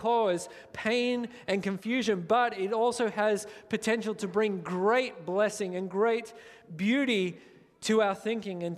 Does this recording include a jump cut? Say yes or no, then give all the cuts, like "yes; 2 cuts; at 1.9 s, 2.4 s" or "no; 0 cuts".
no; 0 cuts